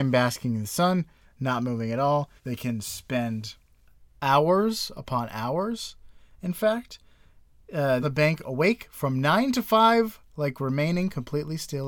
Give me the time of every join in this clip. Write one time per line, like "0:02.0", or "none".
0:02.4
0:08.0